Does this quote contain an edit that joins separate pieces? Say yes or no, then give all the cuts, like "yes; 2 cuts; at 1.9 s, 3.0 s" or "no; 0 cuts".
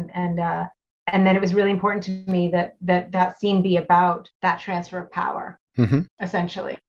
yes; 1 cut; at 4.3 s